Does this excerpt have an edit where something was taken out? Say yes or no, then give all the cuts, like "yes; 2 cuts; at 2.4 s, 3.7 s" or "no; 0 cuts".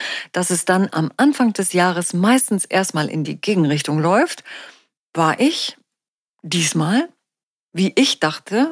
no; 0 cuts